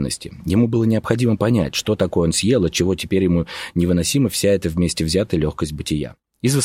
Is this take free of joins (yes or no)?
yes